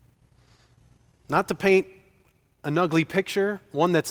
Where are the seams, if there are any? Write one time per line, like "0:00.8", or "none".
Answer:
none